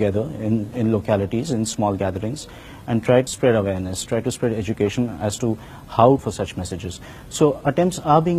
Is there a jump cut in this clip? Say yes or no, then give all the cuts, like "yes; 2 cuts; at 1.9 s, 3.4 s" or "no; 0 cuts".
yes; 2 cuts; at 3.3 s, 6.2 s